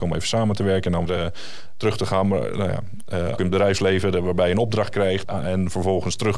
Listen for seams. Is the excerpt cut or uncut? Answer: cut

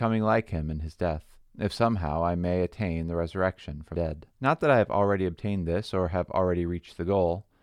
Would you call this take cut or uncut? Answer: cut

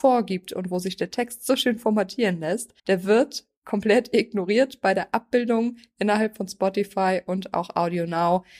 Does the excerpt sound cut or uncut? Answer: cut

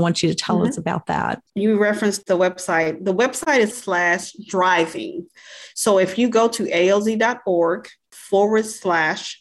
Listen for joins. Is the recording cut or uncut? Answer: cut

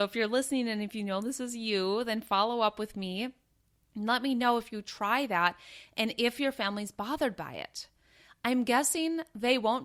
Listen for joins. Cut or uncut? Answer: uncut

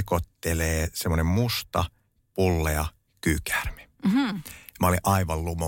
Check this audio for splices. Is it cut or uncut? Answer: uncut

